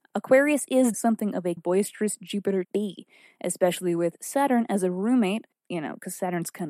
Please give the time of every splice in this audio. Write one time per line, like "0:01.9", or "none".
0:00.9
0:01.6
0:02.6

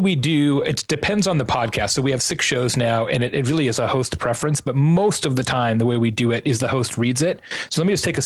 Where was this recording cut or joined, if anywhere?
none

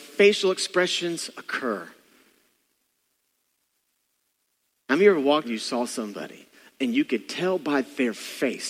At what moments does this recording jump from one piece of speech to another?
0:05.4

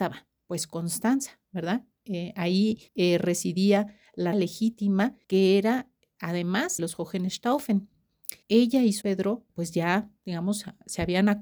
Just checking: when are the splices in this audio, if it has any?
0:02.9
0:04.3
0:05.2
0:06.8
0:08.4
0:09.0
0:09.5

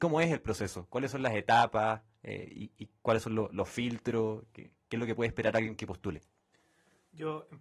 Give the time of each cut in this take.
none

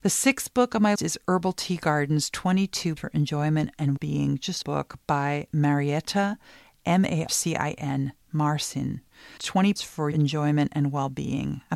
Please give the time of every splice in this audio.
0:00.9
0:03.0
0:04.0
0:04.6
0:07.3
0:09.4
0:09.8
0:10.1

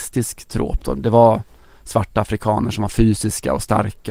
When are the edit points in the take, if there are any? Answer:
none

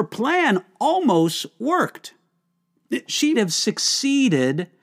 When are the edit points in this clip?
0:03.3

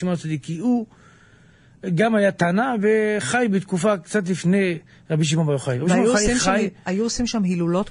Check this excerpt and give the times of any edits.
none

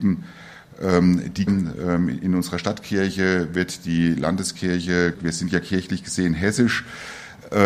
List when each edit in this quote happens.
0:01.5
0:05.1

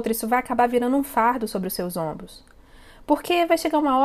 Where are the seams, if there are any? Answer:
none

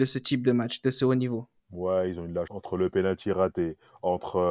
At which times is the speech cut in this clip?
0:01.6
0:02.5

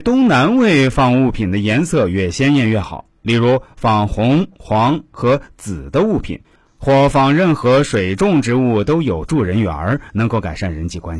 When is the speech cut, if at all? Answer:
0:06.6

